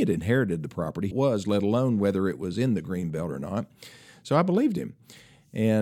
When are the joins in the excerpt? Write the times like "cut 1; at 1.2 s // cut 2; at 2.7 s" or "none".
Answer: cut 1; at 1.1 s